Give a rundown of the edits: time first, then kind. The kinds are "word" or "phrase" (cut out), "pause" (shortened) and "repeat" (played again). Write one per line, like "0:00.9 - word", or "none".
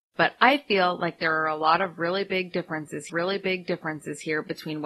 0:03.1 - repeat